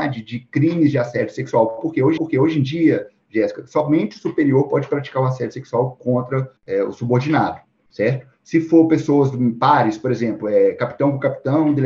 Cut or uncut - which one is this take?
cut